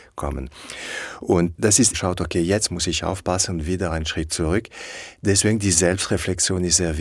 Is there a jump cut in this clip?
yes; 2 cuts; at 1.5 s, 1.9 s

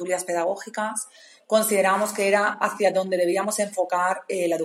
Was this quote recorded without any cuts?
yes; 0 cuts

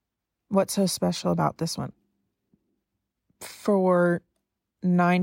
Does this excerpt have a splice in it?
no; 0 cuts

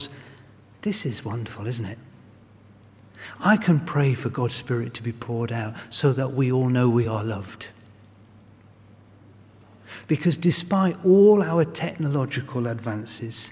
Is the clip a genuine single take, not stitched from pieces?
yes; 0 cuts

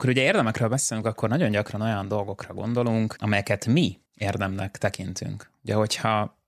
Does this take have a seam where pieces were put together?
yes; 1 cut; at 4.1 s

